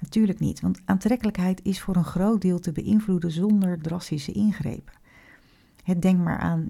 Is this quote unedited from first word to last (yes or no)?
yes